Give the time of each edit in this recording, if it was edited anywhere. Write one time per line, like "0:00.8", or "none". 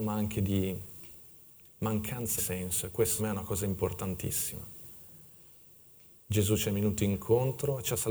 0:02.4
0:03.2